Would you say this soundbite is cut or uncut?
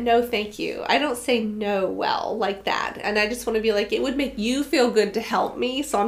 uncut